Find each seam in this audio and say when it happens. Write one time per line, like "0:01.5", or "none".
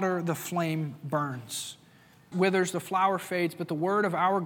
0:02.3